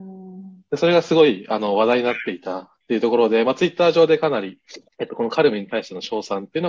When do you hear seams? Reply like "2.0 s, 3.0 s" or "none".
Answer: 4.9 s